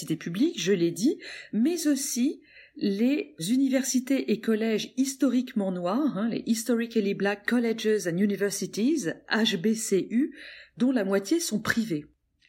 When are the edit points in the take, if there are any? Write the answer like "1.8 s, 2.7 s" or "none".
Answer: none